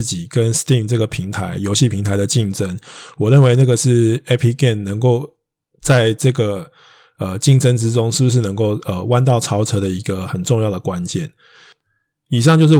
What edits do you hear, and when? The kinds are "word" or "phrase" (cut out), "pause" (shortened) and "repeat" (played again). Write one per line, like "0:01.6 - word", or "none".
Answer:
none